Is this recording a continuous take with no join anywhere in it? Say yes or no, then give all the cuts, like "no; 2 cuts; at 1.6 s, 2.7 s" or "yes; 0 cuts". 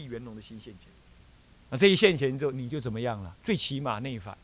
no; 2 cuts; at 1.1 s, 3.4 s